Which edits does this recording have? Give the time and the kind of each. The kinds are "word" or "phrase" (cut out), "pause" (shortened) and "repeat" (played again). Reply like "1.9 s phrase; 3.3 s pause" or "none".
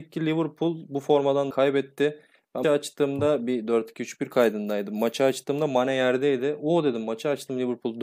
1.5 s word; 2.6 s word